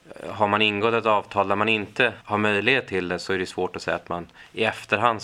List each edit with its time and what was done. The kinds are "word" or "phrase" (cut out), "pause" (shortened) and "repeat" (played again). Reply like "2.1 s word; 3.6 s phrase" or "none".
2.2 s pause